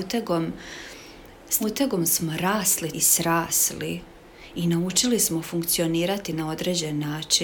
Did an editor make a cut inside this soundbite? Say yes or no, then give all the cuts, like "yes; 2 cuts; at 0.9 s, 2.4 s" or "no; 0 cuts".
yes; 2 cuts; at 1.6 s, 2.9 s